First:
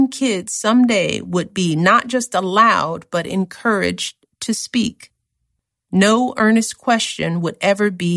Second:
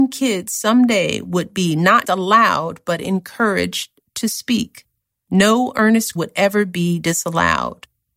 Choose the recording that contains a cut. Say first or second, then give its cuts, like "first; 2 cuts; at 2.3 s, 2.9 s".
second; 3 cuts; at 2.0 s, 5.0 s, 6.2 s